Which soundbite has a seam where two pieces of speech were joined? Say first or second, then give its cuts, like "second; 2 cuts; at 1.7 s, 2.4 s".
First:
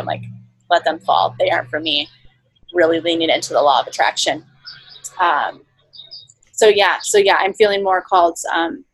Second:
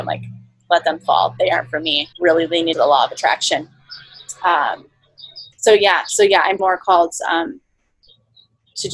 second; 4 cuts; at 2.1 s, 2.7 s, 5.5 s, 6.6 s